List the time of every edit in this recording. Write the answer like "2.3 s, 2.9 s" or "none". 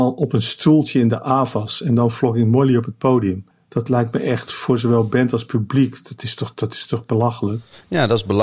3.5 s